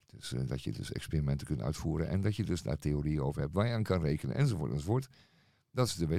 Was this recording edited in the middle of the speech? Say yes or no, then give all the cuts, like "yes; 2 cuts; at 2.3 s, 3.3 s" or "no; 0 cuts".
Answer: no; 0 cuts